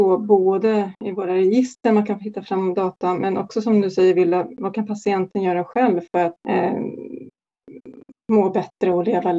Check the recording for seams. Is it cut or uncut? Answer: cut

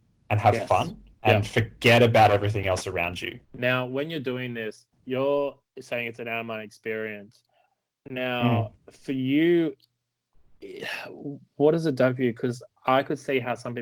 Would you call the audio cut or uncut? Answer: cut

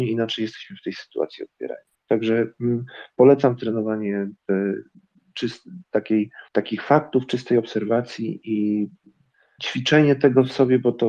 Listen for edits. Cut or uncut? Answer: cut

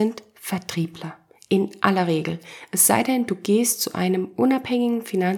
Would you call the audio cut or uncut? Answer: uncut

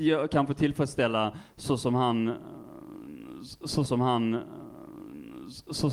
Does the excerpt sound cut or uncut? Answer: cut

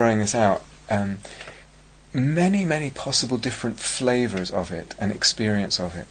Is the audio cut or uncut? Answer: uncut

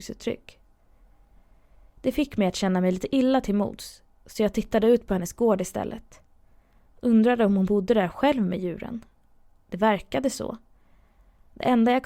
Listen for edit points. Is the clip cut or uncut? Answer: uncut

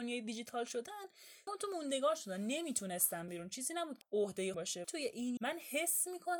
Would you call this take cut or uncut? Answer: cut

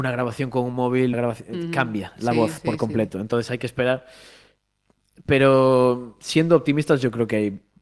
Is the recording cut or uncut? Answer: cut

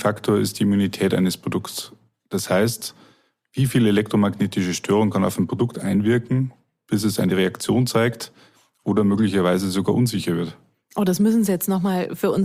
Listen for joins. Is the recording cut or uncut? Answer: uncut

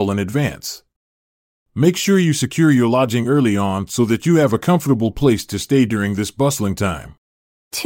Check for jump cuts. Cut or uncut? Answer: uncut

